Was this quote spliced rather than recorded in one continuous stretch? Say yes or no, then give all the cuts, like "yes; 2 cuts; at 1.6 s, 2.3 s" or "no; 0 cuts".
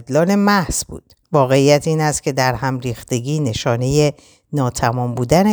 yes; 1 cut; at 1.2 s